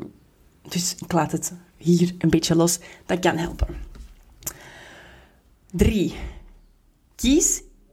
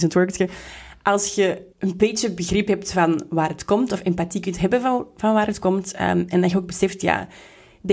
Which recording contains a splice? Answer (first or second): second